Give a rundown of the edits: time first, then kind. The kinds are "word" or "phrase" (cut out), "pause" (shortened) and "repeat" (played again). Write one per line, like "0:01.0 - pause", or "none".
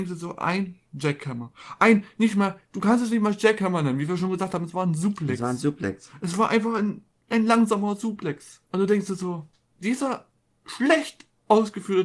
0:08.7 - pause
0:09.5 - pause